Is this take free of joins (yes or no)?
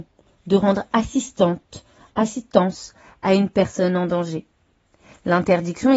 yes